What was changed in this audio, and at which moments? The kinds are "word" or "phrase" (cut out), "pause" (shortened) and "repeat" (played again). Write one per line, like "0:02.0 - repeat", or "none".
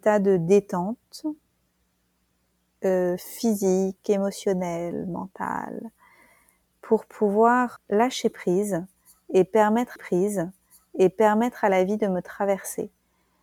0:07.8 - word
0:10.0 - repeat